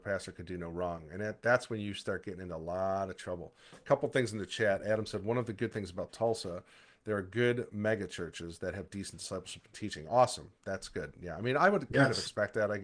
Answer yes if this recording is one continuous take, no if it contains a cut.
yes